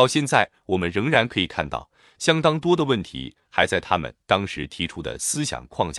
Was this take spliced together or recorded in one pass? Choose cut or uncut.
uncut